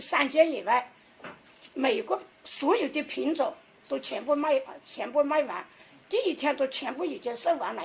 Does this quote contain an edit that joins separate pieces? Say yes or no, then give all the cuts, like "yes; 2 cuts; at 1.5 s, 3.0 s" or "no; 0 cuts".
no; 0 cuts